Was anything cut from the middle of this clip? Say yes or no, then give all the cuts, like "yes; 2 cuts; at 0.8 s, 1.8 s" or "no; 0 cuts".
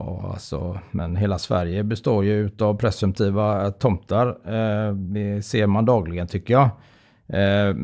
no; 0 cuts